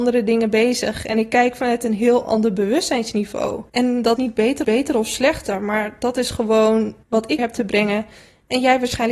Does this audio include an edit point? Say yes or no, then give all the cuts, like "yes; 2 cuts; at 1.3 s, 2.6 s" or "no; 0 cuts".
yes; 5 cuts; at 3.7 s, 4.2 s, 4.6 s, 7.0 s, 7.4 s